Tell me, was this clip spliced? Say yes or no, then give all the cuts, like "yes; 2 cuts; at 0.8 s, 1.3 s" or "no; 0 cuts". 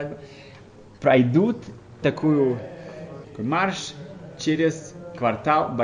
yes; 2 cuts; at 2.0 s, 3.2 s